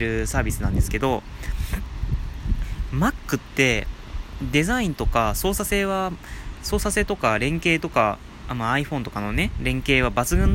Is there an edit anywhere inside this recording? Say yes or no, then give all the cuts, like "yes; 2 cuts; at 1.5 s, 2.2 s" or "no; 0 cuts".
no; 0 cuts